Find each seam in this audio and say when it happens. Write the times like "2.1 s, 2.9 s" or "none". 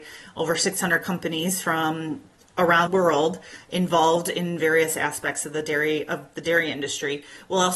2.9 s